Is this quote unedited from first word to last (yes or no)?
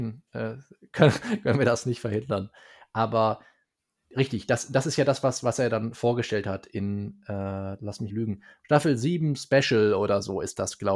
no